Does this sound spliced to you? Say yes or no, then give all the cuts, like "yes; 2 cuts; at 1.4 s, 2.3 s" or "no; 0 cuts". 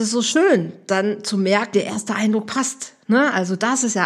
yes; 1 cut; at 1.7 s